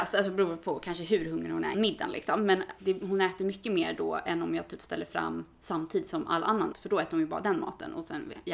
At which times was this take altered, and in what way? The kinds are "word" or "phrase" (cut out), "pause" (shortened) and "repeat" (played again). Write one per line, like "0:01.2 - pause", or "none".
0:01.7 - word
0:02.8 - word
0:06.7 - word